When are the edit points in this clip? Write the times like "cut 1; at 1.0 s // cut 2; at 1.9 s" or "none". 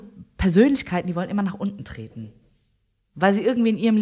none

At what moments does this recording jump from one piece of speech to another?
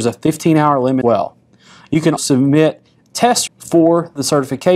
cut 1; at 1.0 s // cut 2; at 2.2 s // cut 3; at 3.5 s

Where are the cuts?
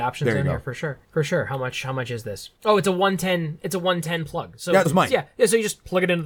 cut 1; at 1.0 s // cut 2; at 2.6 s // cut 3; at 4.9 s

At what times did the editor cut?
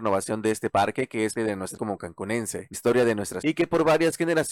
cut 1; at 1.3 s // cut 2; at 1.8 s // cut 3; at 2.7 s // cut 4; at 3.4 s

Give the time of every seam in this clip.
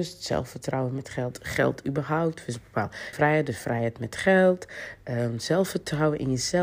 cut 1; at 3.1 s

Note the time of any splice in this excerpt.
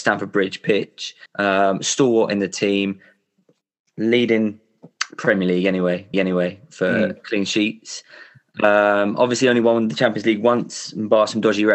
cut 1; at 1.3 s // cut 2; at 6.1 s

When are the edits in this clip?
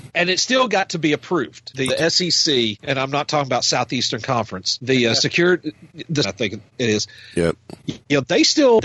cut 1; at 1.9 s // cut 2; at 6.2 s // cut 3; at 6.7 s

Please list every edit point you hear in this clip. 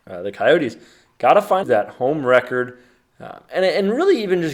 cut 1; at 1.6 s

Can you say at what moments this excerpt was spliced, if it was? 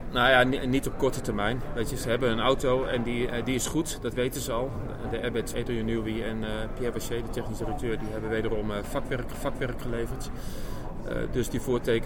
cut 1; at 5.5 s // cut 2; at 9.3 s

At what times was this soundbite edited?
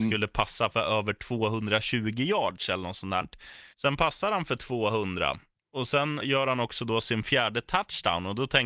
cut 1; at 3.7 s // cut 2; at 5.6 s // cut 3; at 6.2 s

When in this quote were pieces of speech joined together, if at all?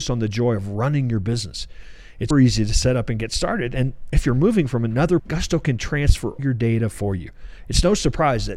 cut 1; at 2.3 s // cut 2; at 5.2 s // cut 3; at 6.4 s

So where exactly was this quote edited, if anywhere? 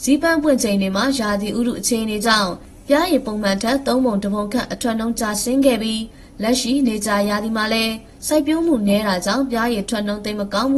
none

